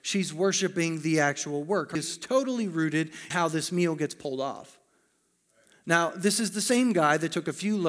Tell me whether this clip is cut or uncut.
cut